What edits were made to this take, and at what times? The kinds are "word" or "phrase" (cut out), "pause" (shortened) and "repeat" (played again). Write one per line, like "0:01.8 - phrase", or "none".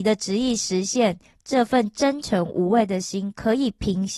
none